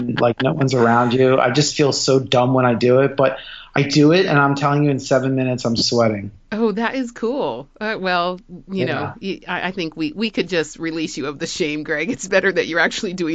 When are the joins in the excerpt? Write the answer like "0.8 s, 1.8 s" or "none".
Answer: none